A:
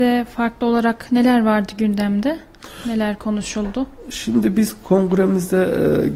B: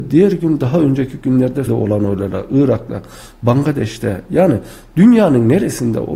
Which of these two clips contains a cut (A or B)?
B